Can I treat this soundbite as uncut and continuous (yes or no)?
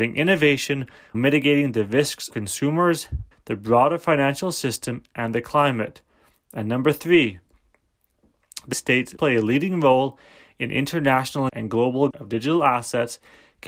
no